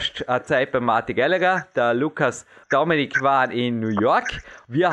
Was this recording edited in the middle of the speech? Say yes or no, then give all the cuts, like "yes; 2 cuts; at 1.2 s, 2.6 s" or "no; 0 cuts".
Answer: yes; 1 cut; at 2.6 s